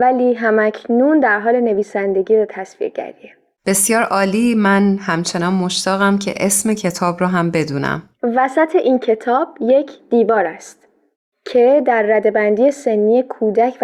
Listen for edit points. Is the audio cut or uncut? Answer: uncut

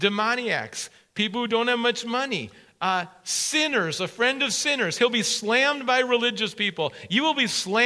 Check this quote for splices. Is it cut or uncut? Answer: uncut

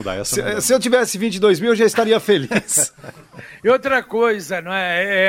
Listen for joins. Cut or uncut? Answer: uncut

